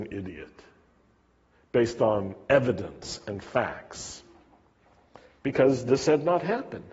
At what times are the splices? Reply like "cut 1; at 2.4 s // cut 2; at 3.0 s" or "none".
none